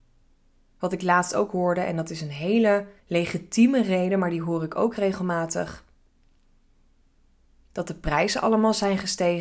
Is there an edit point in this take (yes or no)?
yes